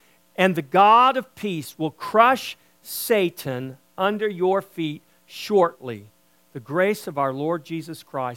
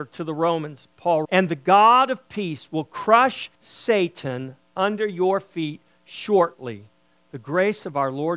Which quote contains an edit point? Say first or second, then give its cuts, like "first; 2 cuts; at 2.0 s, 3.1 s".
second; 2 cuts; at 1.2 s, 3.5 s